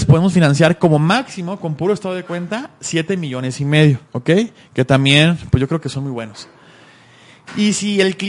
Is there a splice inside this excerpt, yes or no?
yes